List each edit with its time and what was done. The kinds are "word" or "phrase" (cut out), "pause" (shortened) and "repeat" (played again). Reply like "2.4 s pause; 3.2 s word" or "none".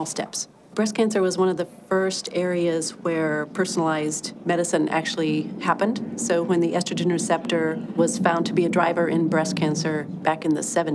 none

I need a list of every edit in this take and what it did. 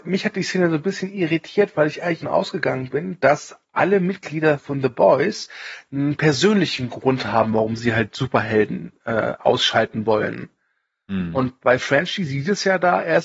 2.2 s phrase

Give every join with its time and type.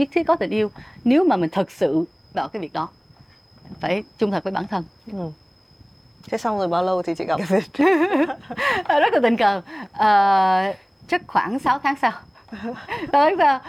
2.3 s word; 3.8 s word; 7.4 s word

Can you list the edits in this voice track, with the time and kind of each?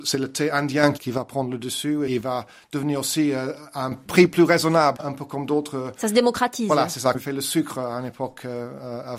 2.1 s word; 5.0 s word; 7.1 s word

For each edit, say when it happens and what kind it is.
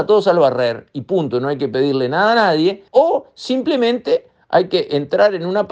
2.9 s pause

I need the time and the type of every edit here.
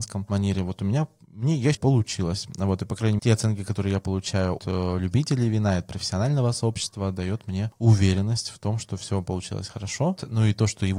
1.7 s word; 3.2 s word; 4.6 s word

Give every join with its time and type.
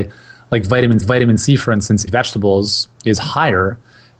1.0 s repeat; 2.1 s phrase; 2.9 s pause

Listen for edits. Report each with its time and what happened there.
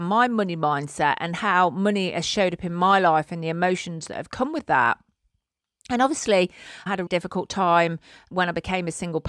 7.1 s word

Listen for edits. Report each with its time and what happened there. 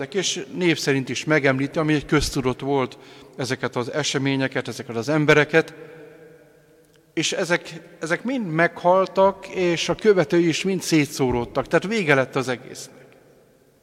none

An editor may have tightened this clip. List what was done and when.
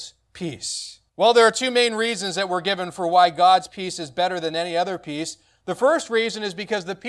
1.1 s pause

